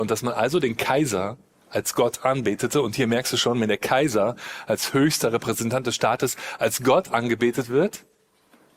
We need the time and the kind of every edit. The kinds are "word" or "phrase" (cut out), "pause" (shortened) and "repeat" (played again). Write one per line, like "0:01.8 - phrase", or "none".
0:01.5 - pause